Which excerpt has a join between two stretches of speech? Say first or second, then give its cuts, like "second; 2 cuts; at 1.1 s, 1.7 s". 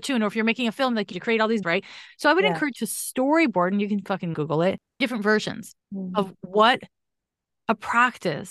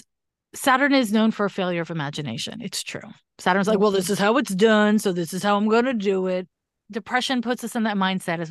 first; 6 cuts; at 1.1 s, 1.6 s, 2.7 s, 4.3 s, 5.0 s, 5.8 s